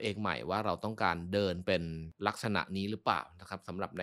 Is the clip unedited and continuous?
yes; 0 cuts

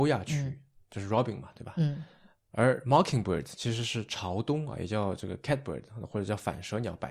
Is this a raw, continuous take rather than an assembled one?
yes; 0 cuts

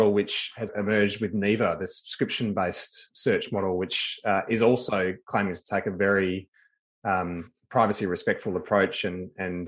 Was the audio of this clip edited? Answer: no; 0 cuts

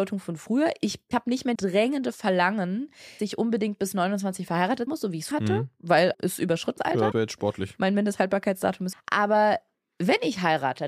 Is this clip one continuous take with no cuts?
no; 9 cuts; at 1.1 s, 1.5 s, 3.2 s, 4.9 s, 5.3 s, 6.1 s, 6.8 s, 7.1 s, 8.9 s

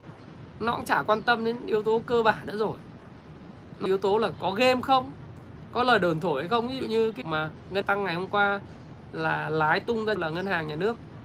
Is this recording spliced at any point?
yes; 4 cuts; at 3.9 s, 7.2 s, 7.8 s, 10.2 s

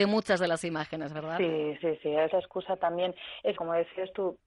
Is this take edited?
yes; 3 cuts; at 1.8 s, 2.3 s, 3.6 s

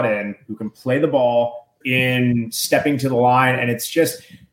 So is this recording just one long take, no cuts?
no; 1 cut; at 1.8 s

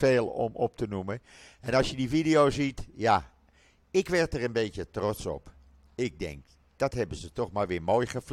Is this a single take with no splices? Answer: yes; 0 cuts

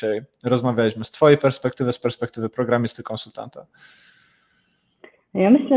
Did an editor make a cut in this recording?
no; 0 cuts

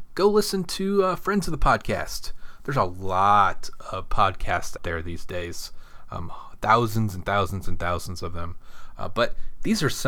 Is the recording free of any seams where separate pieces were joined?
no; 1 cut; at 4.8 s

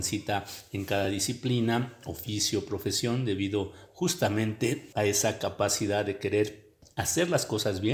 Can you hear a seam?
no; 0 cuts

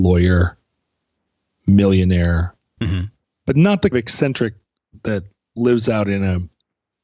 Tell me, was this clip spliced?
yes; 3 cuts; at 2.8 s, 3.2 s, 3.9 s

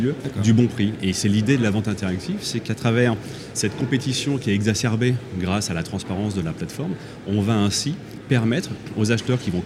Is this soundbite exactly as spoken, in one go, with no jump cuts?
yes; 0 cuts

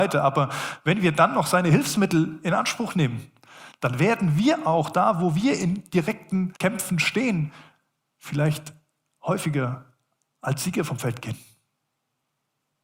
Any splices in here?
yes; 1 cut; at 6.6 s

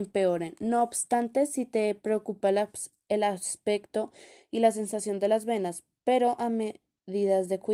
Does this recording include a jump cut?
no; 0 cuts

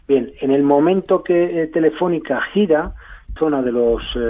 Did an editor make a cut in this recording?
yes; 1 cut; at 3.4 s

